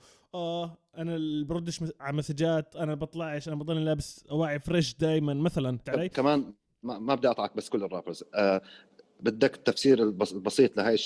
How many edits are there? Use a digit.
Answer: 2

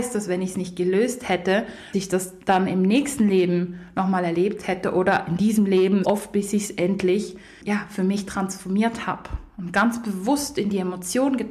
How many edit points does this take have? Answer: 2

